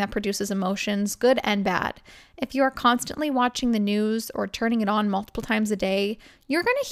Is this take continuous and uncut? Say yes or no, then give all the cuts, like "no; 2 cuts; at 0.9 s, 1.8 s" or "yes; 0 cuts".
yes; 0 cuts